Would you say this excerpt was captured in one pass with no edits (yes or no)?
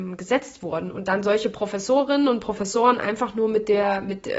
yes